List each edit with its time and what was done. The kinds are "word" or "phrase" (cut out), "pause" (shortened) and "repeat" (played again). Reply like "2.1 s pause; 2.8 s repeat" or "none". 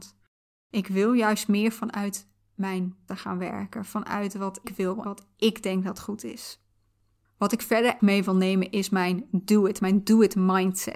3.1 s word; 4.6 s word; 5.0 s word; 8.0 s word; 9.8 s word